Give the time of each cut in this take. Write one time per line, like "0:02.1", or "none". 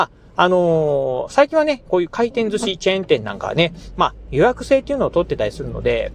0:01.8